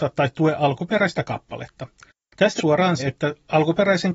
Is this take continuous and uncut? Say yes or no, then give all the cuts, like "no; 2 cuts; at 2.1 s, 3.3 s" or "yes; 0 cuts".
no; 2 cuts; at 2.6 s, 3.0 s